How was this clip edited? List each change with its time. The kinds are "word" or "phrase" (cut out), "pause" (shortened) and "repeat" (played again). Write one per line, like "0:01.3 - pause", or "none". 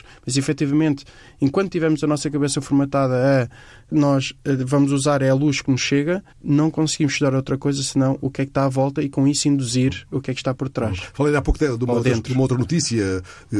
0:06.3 - pause